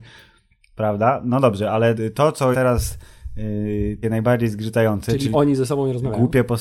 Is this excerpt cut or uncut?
cut